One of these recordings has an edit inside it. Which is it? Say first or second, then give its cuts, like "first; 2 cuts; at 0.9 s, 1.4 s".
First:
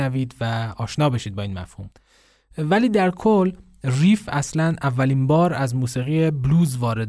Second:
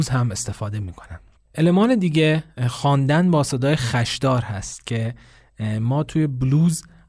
second; 1 cut; at 1.4 s